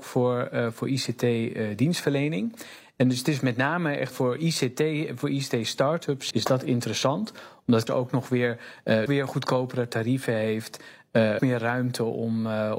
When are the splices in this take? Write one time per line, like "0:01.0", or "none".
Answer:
0:04.1
0:06.3
0:07.9
0:09.1
0:11.4